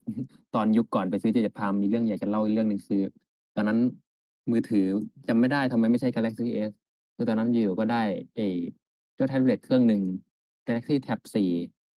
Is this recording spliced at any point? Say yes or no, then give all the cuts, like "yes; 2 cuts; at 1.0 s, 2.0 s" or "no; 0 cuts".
no; 0 cuts